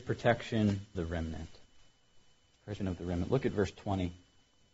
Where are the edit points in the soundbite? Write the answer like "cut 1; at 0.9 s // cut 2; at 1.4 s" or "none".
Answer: cut 1; at 0.9 s // cut 2; at 2.8 s